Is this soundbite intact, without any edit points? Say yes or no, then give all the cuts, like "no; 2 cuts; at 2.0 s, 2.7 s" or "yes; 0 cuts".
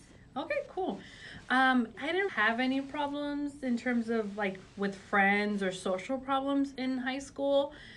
no; 2 cuts; at 1.9 s, 2.3 s